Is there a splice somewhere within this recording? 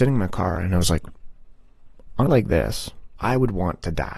yes; 2 cuts; at 2.3 s, 3.2 s

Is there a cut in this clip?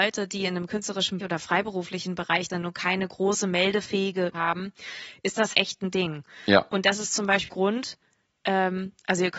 yes; 5 cuts; at 1.2 s, 2.5 s, 4.3 s, 5.5 s, 7.5 s

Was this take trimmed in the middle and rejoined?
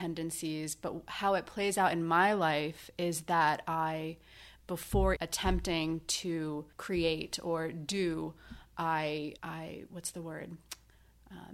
yes; 3 cuts; at 5.2 s, 6.7 s, 9.4 s

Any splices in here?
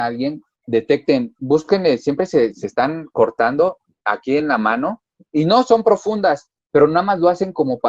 no; 0 cuts

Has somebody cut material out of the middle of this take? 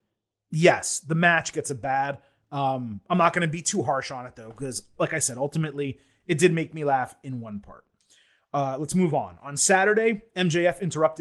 no; 0 cuts

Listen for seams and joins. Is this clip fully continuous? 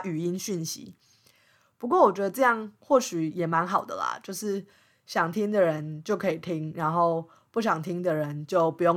yes; 0 cuts

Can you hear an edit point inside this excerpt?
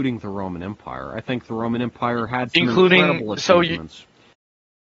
no; 0 cuts

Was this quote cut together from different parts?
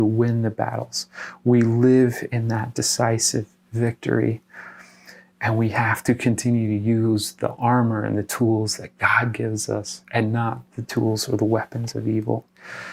no; 0 cuts

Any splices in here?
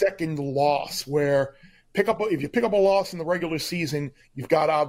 no; 0 cuts

